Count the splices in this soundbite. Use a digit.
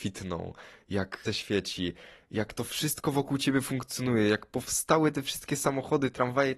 1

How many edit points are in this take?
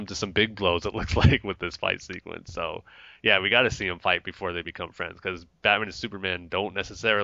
0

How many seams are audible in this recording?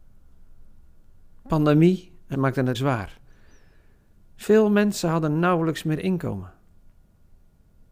2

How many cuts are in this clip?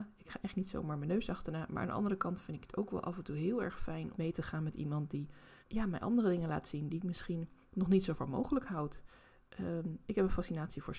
3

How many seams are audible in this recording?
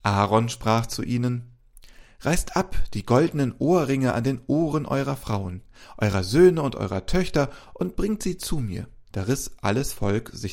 1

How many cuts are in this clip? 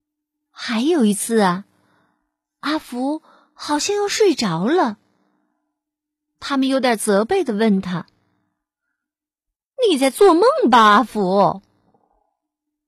0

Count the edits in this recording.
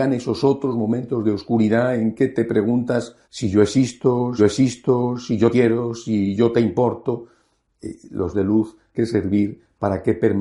5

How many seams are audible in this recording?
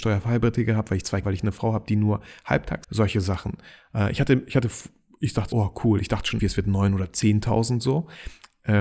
4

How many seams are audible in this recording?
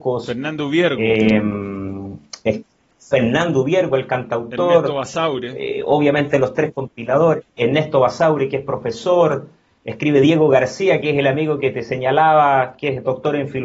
0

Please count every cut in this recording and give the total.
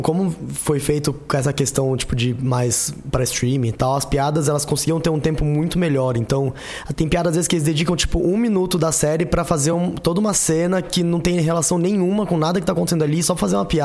0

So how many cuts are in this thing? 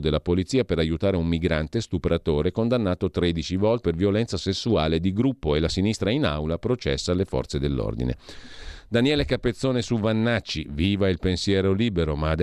1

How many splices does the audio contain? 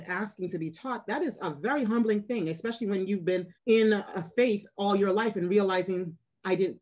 1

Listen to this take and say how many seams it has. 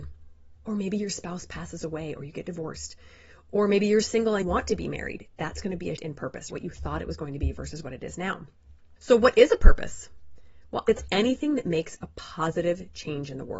2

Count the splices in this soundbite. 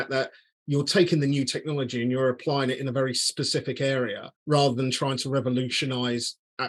1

